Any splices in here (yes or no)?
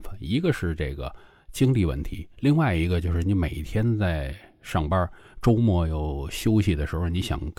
no